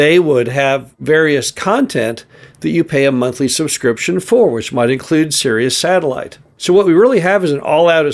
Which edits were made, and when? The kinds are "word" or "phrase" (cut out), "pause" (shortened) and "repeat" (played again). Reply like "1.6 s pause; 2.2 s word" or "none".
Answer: none